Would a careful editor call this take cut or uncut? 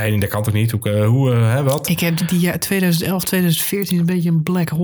cut